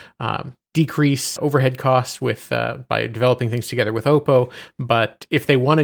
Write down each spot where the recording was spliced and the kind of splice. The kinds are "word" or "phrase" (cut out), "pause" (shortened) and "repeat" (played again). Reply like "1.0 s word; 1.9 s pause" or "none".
1.4 s word